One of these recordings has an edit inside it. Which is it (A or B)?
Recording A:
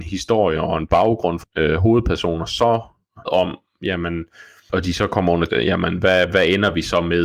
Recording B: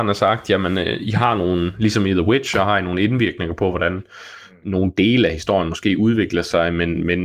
A